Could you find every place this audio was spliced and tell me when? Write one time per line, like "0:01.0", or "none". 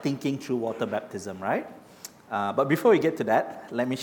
none